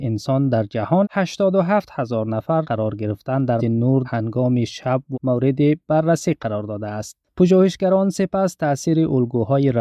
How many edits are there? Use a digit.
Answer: 6